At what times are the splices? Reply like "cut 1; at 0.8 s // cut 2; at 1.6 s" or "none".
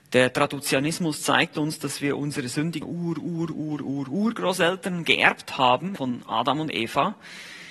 cut 1; at 2.8 s // cut 2; at 6.0 s